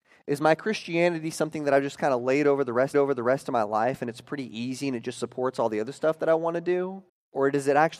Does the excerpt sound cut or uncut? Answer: cut